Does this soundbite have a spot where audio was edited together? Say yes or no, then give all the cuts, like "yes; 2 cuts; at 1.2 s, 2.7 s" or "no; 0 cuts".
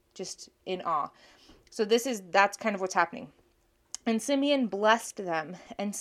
no; 0 cuts